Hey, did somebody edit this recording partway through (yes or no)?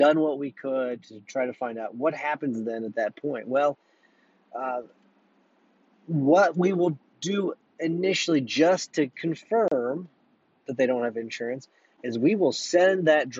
no